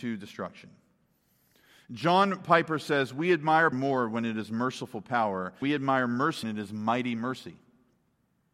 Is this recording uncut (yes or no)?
no